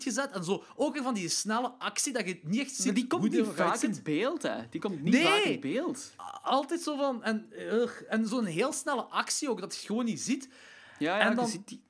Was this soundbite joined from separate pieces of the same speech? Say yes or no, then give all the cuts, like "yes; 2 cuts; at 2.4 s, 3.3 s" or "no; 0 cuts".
no; 0 cuts